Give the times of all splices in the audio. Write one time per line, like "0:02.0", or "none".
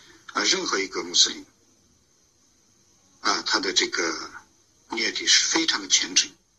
none